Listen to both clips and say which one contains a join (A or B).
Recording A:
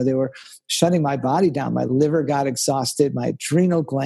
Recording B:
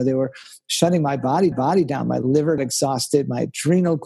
B